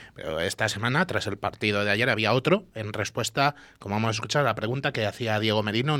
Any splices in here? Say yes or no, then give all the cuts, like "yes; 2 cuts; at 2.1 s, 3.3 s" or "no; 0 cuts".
no; 0 cuts